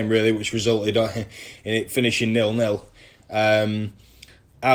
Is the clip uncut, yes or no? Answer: yes